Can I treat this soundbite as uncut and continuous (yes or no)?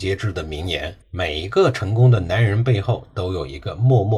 no